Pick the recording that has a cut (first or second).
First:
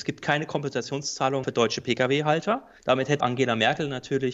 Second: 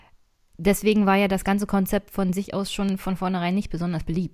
first